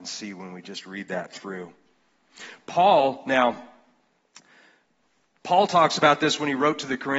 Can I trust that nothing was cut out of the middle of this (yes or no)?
yes